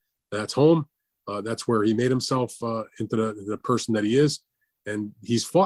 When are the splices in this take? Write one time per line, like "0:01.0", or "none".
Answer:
none

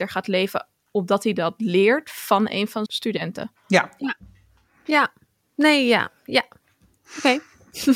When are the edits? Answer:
0:02.9

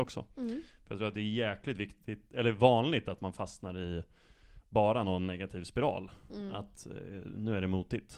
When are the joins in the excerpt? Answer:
none

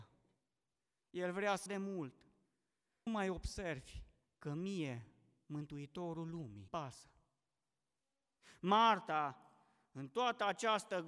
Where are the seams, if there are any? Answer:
0:01.7
0:03.1
0:06.7

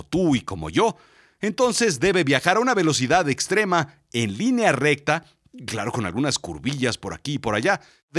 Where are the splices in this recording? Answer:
none

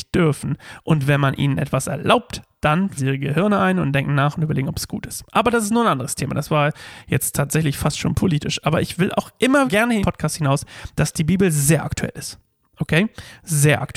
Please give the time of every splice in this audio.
0:03.0
0:09.7
0:10.0

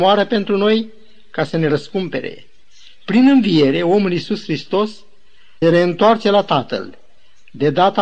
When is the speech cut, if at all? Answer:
0:05.6

